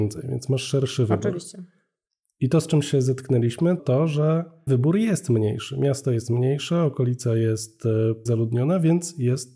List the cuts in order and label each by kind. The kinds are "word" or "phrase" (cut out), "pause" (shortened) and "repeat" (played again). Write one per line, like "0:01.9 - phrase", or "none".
0:03.8 - word
0:04.7 - word
0:08.3 - word